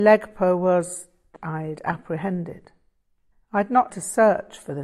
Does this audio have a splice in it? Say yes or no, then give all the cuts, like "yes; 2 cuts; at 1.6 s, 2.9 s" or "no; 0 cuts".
yes; 3 cuts; at 1.4 s, 3.3 s, 3.9 s